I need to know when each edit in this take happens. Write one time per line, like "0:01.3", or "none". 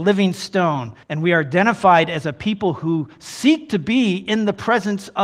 0:01.0